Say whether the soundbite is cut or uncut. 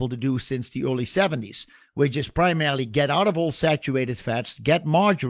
uncut